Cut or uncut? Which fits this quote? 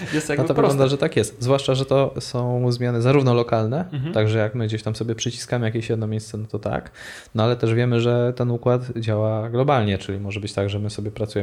uncut